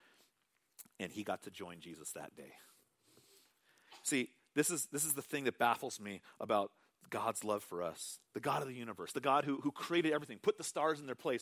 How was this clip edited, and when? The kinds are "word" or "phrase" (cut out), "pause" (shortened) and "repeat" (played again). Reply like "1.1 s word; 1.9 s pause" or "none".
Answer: 8.2 s pause

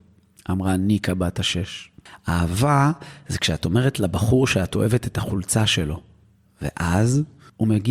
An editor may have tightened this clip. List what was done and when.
none

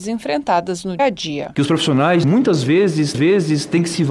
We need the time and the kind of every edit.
1.0 s word; 2.2 s phrase; 3.1 s repeat

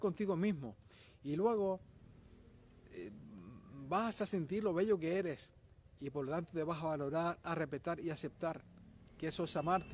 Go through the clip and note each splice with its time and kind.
none

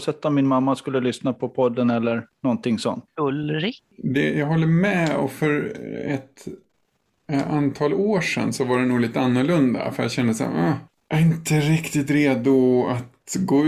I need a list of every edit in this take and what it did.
none

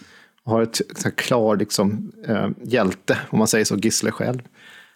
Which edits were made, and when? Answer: none

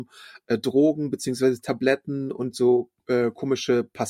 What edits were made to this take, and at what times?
none

